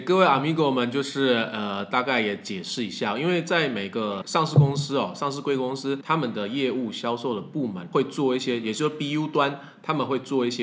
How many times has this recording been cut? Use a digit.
0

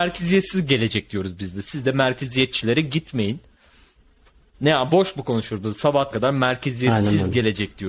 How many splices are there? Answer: 1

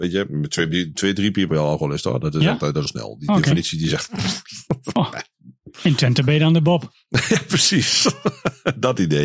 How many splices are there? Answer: 3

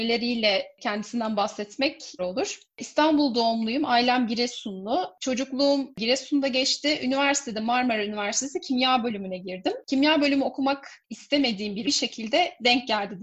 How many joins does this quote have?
2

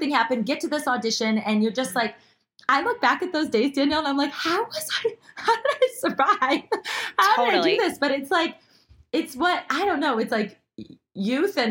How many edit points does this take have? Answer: 0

